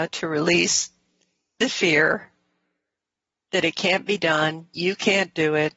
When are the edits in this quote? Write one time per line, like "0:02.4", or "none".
none